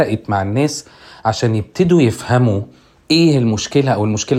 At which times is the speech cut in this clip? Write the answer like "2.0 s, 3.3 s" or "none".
none